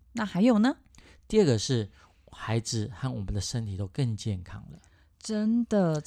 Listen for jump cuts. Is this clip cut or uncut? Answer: uncut